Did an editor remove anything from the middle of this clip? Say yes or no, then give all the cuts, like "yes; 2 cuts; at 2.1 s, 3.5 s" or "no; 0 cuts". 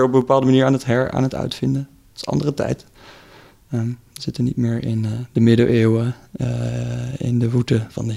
no; 0 cuts